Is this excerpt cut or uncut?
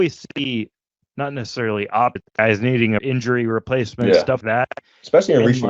cut